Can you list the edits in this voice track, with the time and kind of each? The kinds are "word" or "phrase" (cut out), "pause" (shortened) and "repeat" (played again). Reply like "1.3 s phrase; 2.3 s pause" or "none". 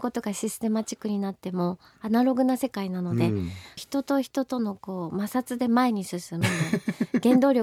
none